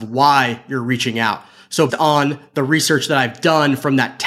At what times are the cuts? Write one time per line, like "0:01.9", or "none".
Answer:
0:01.9